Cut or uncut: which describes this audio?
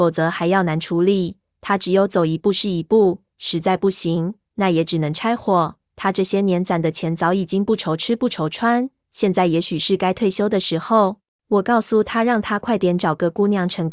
cut